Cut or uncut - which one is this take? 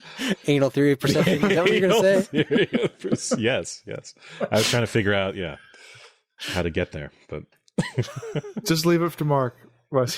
uncut